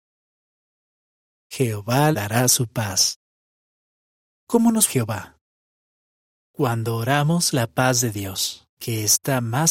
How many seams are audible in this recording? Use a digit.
3